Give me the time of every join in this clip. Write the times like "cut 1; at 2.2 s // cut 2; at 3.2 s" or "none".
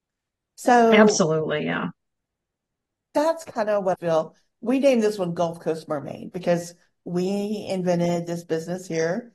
cut 1; at 3.9 s